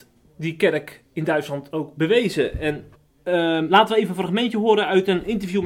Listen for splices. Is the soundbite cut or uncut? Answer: cut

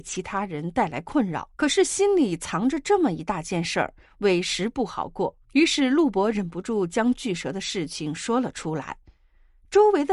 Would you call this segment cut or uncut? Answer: cut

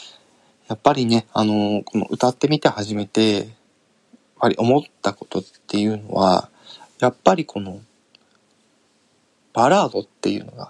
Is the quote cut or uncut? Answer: uncut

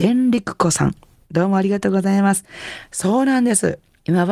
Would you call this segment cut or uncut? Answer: uncut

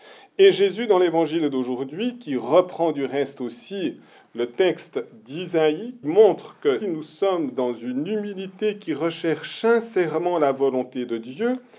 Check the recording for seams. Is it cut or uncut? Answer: cut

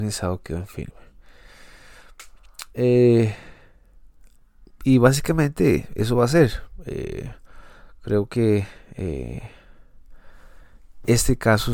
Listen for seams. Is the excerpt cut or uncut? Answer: uncut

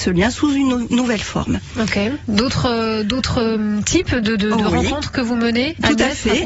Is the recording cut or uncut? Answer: uncut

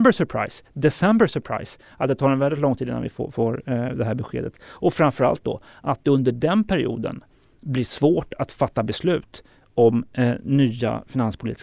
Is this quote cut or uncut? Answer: uncut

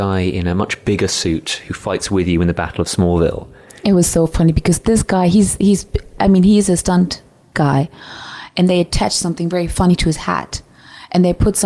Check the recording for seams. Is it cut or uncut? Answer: uncut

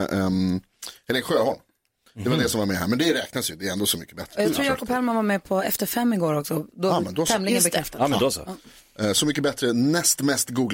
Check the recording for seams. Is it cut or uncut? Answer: uncut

